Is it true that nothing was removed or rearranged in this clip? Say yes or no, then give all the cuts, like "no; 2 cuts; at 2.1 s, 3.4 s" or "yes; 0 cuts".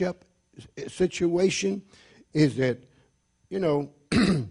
yes; 0 cuts